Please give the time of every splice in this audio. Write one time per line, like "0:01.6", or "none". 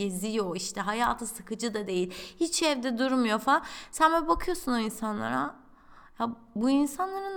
none